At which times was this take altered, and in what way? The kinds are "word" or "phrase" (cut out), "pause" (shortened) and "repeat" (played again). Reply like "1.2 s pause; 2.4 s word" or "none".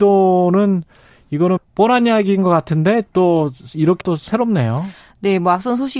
1.6 s word; 3.1 s word; 4.0 s word

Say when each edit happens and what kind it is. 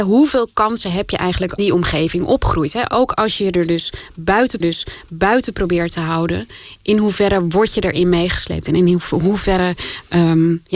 1.6 s phrase; 4.6 s repeat

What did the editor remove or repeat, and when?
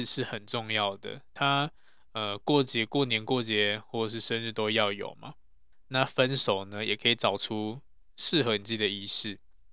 none

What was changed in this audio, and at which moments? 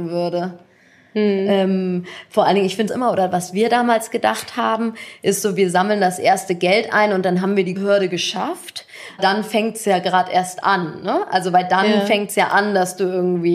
2.9 s phrase; 7.8 s word; 9.2 s word

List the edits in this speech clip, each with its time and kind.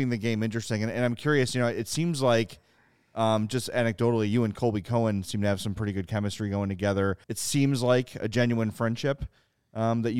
7.2 s pause

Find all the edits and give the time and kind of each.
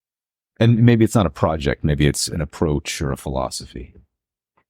none

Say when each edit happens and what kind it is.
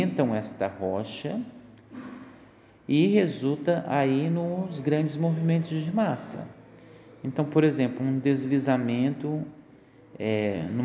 none

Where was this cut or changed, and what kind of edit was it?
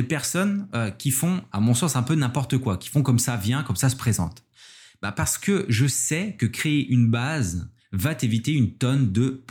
none

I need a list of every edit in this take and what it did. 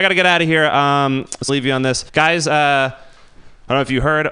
1.5 s phrase; 2.1 s pause

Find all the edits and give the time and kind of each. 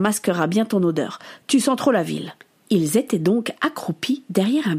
2.5 s pause

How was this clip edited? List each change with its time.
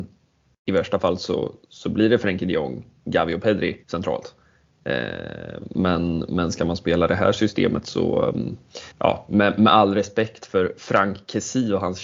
3.8 s pause; 8.9 s pause

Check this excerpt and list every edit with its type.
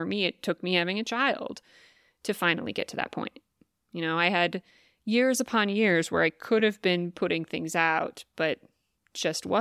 none

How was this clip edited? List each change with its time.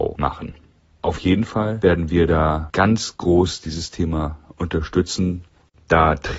none

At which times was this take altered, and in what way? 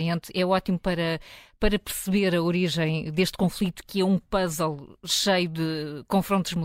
none

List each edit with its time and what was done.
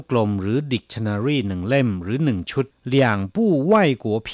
2.8 s pause

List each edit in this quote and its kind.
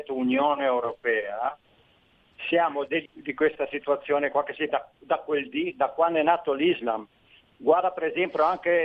3.1 s phrase; 4.7 s word

